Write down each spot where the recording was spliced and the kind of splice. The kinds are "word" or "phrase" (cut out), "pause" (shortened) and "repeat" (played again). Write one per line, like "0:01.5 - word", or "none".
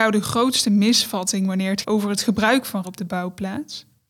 0:01.8 - word
0:02.8 - word